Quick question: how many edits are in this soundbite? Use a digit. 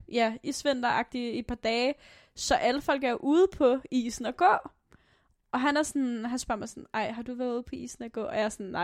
0